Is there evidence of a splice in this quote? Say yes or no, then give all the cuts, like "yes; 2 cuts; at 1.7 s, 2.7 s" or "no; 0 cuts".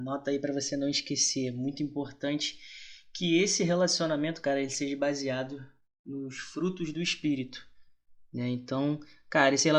no; 0 cuts